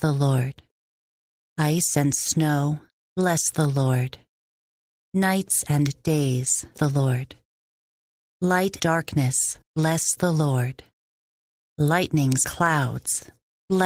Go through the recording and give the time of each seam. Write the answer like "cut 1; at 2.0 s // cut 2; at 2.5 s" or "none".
cut 1; at 2.9 s // cut 2; at 6.7 s // cut 3; at 8.8 s // cut 4; at 9.6 s // cut 5; at 12.4 s